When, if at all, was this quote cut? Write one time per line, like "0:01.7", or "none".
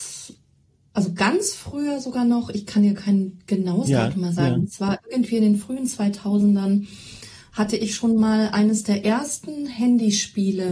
none